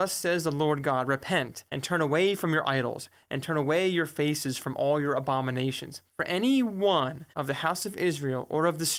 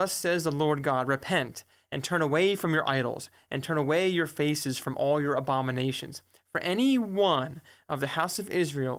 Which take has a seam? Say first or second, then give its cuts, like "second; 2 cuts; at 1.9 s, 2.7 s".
first; 3 cuts; at 1.7 s, 6.1 s, 7.3 s